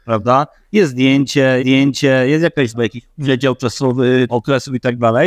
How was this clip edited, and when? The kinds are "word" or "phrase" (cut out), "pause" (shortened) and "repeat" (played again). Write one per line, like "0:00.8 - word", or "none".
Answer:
0:01.6 - repeat
0:02.7 - word
0:04.3 - word